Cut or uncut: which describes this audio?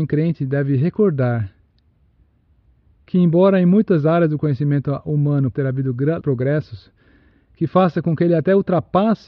cut